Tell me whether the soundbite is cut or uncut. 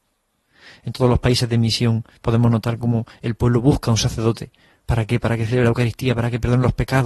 uncut